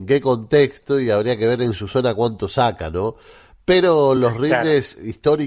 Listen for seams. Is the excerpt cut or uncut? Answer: uncut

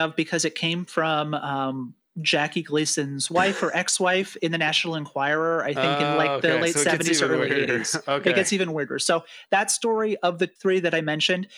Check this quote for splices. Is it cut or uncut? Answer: cut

